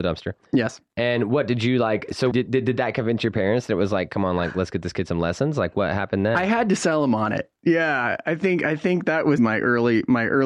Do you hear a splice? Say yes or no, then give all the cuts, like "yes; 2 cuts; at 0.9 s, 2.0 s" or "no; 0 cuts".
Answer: yes; 2 cuts; at 2.3 s, 9.4 s